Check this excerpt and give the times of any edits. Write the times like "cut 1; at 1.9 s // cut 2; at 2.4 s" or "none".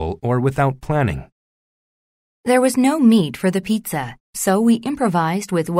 none